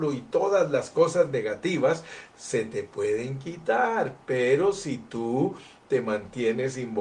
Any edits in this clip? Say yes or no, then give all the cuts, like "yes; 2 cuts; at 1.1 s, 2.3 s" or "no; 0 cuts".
no; 0 cuts